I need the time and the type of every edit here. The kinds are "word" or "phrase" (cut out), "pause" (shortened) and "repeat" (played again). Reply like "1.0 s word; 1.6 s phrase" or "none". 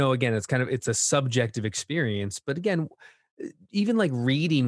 none